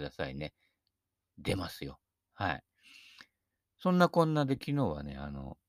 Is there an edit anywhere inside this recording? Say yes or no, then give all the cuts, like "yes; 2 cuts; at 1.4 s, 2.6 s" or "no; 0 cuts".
no; 0 cuts